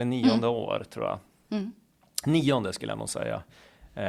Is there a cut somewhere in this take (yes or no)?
no